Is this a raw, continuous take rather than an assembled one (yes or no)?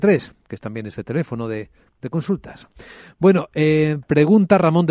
yes